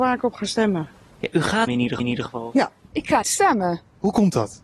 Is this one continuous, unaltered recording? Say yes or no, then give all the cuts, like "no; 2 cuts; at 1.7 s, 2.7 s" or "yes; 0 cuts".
no; 3 cuts; at 1.7 s, 2.0 s, 3.2 s